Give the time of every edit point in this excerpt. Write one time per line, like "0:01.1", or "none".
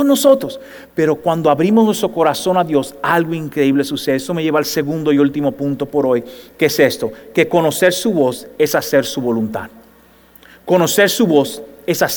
none